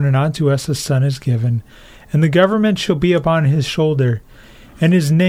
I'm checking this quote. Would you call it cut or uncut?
uncut